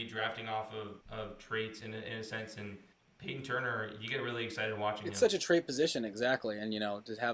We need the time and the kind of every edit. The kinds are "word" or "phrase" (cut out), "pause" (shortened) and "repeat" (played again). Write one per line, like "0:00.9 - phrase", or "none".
0:01.0 - pause
0:02.9 - pause